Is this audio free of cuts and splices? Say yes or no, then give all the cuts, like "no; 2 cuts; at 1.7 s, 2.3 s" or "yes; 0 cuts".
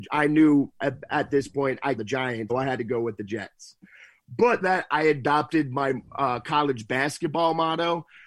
no; 3 cuts; at 2.0 s, 2.5 s, 4.6 s